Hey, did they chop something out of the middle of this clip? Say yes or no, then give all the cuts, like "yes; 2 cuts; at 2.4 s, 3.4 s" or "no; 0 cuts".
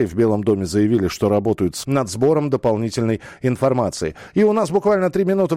yes; 1 cut; at 1.8 s